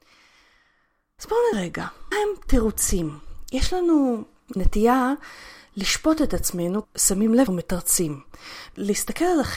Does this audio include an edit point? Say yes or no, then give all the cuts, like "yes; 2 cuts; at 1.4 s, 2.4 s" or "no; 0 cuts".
yes; 5 cuts; at 1.5 s, 2.1 s, 4.6 s, 6.8 s, 7.5 s